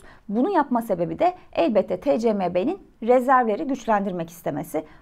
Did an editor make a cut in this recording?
no; 0 cuts

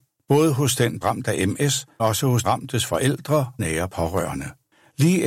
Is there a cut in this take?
yes; 4 cuts; at 1.0 s, 2.0 s, 2.4 s, 3.6 s

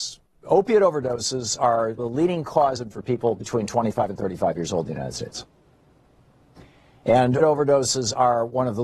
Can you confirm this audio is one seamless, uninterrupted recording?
no; 3 cuts; at 2.0 s, 2.9 s, 7.4 s

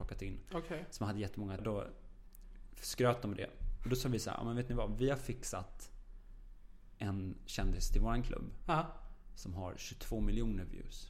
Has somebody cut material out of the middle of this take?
yes; 1 cut; at 1.6 s

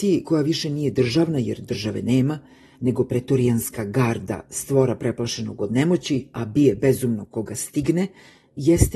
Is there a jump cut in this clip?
no; 0 cuts

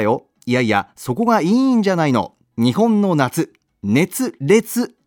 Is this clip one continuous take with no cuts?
yes; 0 cuts

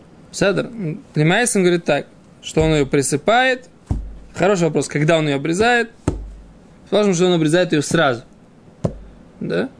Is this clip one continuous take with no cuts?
yes; 0 cuts

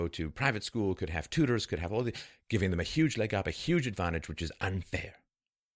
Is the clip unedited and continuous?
yes; 0 cuts

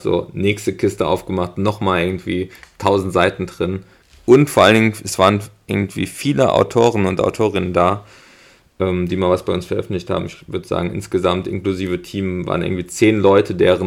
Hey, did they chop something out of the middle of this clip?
no; 0 cuts

